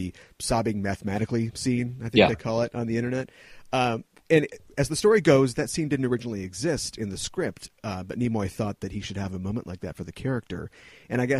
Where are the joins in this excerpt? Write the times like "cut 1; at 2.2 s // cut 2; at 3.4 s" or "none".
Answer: none